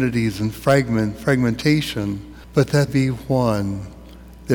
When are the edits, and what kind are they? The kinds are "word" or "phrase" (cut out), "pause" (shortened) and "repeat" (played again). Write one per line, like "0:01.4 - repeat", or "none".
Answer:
0:02.4 - pause
0:02.9 - word